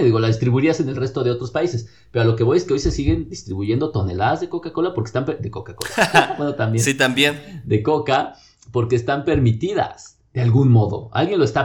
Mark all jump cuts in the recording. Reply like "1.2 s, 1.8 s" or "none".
none